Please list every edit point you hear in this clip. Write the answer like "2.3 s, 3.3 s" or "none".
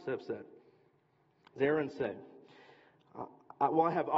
1.6 s